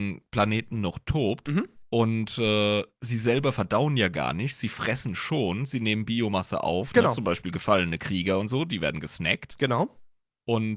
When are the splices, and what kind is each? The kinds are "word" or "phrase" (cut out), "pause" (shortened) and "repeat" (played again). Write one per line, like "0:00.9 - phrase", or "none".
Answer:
0:01.8 - pause